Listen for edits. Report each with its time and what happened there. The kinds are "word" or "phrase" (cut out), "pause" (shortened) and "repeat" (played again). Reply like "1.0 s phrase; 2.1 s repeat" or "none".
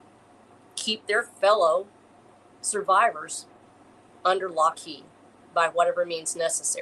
2.2 s pause; 4.7 s word